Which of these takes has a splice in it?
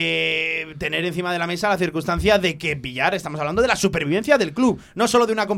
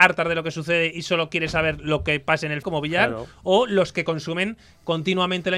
second; 1 cut; at 2.6 s

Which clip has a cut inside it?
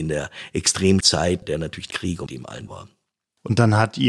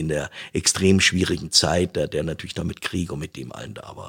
first; 5 cuts; at 1.0 s, 1.4 s, 1.9 s, 2.3 s, 2.7 s

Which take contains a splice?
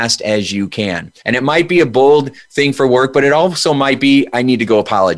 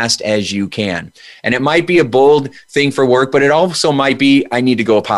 first; 1 cut; at 1.2 s

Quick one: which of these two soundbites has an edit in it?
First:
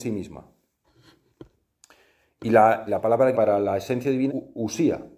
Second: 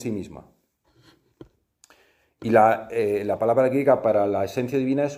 first; 3 cuts; at 2.9 s, 3.3 s, 4.3 s

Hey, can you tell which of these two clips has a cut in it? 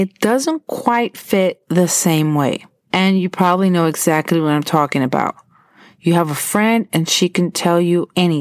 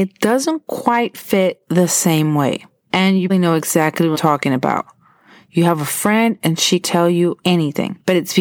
second; 3 cuts; at 3.3 s, 4.1 s, 6.8 s

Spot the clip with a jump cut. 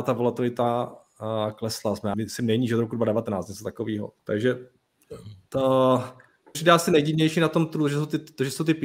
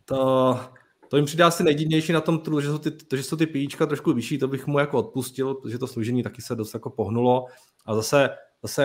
first; 3 cuts; at 2.1 s, 4.2 s, 6.5 s

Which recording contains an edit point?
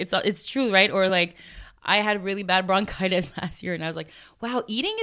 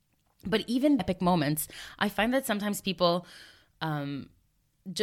second; 1 cut; at 1.0 s

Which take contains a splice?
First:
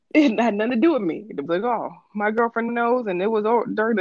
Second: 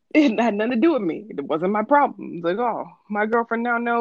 first; 2 cuts; at 1.5 s, 2.7 s

